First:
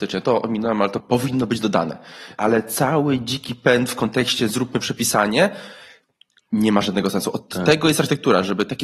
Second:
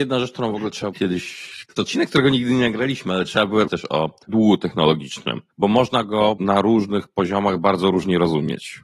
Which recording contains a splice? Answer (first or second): second